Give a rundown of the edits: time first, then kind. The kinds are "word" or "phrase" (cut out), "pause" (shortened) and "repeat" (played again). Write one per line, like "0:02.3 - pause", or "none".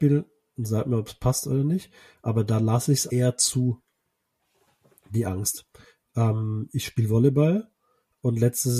0:03.1 - word